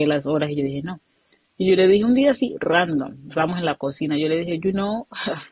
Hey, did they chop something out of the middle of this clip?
no; 0 cuts

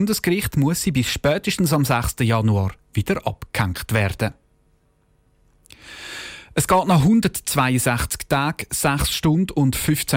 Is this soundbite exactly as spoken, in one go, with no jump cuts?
yes; 0 cuts

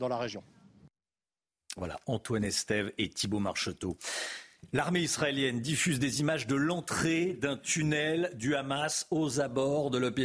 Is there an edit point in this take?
no; 0 cuts

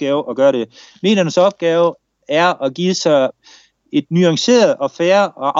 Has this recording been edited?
no; 0 cuts

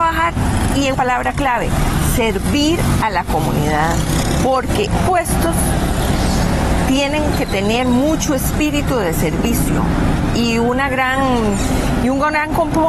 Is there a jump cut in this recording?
yes; 2 cuts; at 0.9 s, 5.0 s

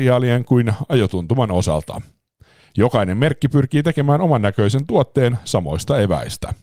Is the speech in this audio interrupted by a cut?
no; 0 cuts

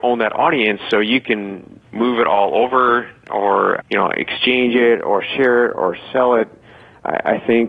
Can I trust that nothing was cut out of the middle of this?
no; 2 cuts; at 1.8 s, 3.8 s

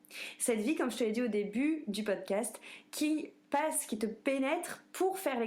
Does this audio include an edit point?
no; 0 cuts

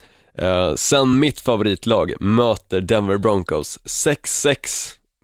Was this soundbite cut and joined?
no; 0 cuts

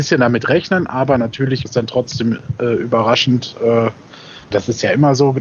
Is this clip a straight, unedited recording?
no; 2 cuts; at 1.7 s, 4.5 s

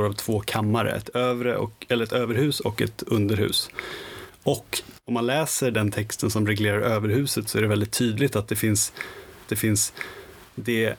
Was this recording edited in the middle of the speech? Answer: yes; 2 cuts; at 5.0 s, 9.5 s

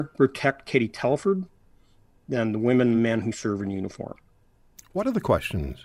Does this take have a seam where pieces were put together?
no; 0 cuts

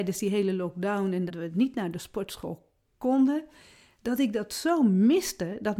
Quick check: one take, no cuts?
no; 1 cut; at 1.3 s

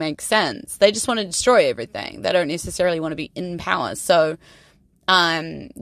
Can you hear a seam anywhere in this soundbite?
no; 0 cuts

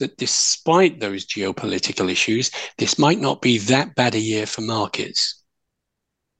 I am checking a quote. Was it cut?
no; 0 cuts

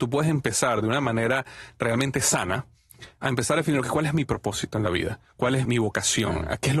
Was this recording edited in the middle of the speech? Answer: yes; 1 cut; at 5.6 s

